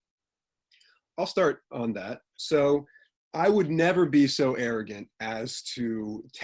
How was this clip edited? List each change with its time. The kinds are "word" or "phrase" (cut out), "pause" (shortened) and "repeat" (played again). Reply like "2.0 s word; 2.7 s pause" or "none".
3.3 s word